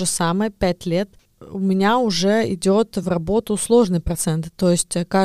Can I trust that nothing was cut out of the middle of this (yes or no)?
yes